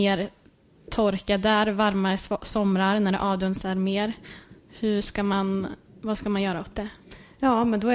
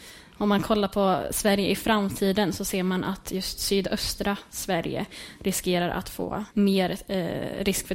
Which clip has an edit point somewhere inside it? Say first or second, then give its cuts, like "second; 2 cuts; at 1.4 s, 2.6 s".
second; 1 cut; at 6.5 s